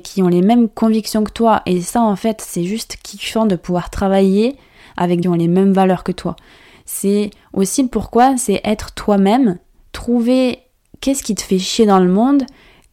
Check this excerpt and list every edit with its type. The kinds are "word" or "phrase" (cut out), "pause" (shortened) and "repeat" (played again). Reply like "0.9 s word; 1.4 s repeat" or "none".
5.2 s phrase

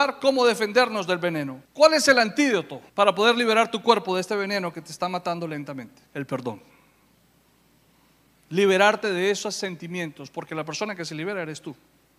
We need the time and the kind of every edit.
1.6 s pause; 2.9 s pause; 6.1 s pause

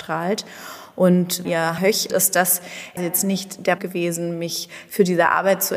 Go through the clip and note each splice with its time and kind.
1.4 s word; 1.8 s word; 2.1 s word; 3.0 s word; 3.8 s word

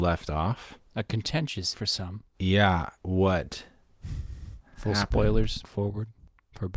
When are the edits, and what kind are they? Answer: 1.7 s word; 4.7 s pause; 5.6 s word

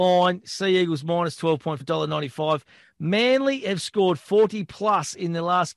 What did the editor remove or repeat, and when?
1.8 s word

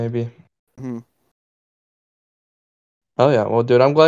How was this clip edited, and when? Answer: none

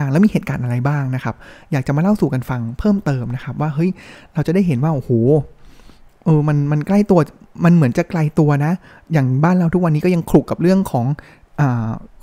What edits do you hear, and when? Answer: none

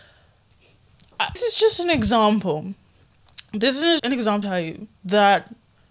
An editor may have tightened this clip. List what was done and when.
1.4 s word; 4.0 s word; 4.4 s word

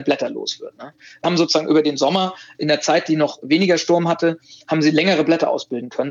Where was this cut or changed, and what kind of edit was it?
1.2 s word; 2.6 s word; 3.4 s word

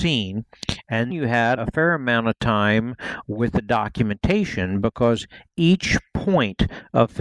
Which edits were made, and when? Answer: 1.1 s word; 1.6 s word

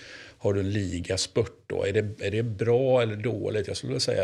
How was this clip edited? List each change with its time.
none

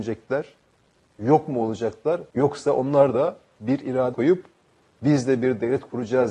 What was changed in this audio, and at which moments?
2.3 s pause; 4.1 s word

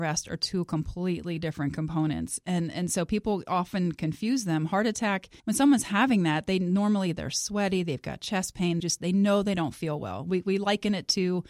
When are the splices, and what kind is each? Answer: 5.4 s pause; 8.8 s phrase

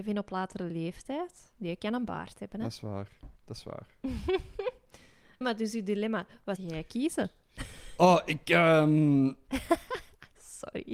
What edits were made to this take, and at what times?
3.4 s pause; 5.4 s word; 6.6 s word

